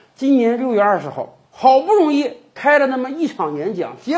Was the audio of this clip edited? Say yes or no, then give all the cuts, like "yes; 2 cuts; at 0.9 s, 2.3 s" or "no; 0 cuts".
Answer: yes; 1 cut; at 1.5 s